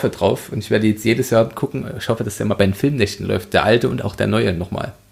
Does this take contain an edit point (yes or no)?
no